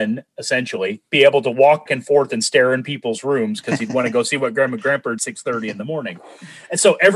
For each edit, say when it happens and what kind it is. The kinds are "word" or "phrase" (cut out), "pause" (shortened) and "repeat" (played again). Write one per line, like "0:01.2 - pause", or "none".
0:01.9 - word
0:05.2 - phrase